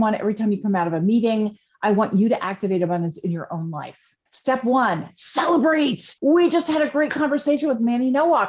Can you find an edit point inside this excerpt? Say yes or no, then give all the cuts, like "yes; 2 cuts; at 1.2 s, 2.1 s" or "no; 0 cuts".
yes; 2 cuts; at 4.3 s, 6.2 s